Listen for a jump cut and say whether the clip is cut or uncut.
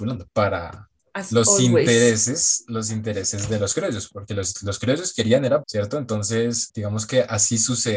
cut